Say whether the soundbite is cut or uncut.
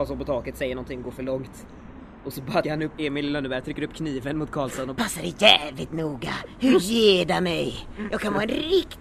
cut